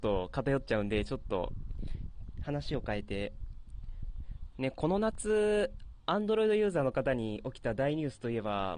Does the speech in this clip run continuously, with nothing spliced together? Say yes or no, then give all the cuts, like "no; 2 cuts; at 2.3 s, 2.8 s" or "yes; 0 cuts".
yes; 0 cuts